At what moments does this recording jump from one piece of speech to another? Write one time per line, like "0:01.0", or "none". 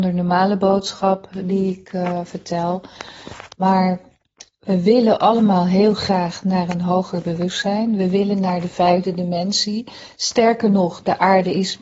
none